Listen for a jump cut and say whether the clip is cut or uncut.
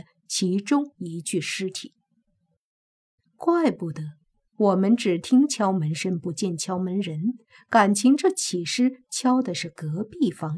uncut